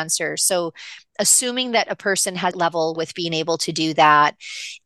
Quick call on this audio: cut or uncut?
cut